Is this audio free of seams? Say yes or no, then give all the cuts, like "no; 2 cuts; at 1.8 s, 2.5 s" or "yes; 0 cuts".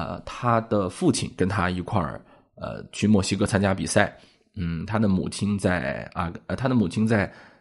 yes; 0 cuts